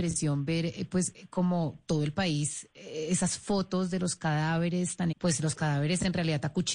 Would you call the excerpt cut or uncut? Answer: cut